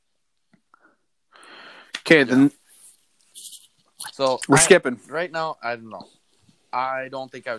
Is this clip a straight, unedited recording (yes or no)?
yes